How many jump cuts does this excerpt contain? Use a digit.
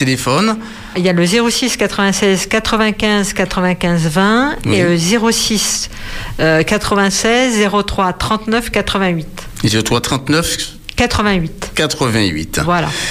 1